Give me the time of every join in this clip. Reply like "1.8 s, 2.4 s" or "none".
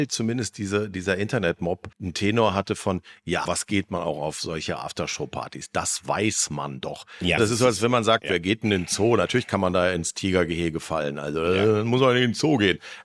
1.9 s, 3.5 s, 7.4 s